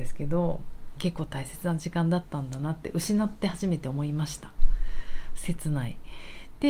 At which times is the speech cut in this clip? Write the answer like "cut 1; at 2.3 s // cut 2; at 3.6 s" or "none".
cut 1; at 1.0 s